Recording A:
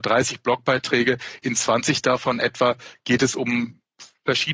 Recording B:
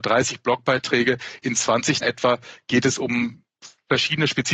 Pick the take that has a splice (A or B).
B